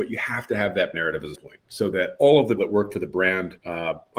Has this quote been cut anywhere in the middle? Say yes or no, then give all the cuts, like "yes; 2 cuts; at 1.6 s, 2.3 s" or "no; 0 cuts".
yes; 3 cuts; at 0.9 s, 1.3 s, 2.6 s